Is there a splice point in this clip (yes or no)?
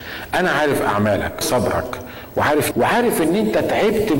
yes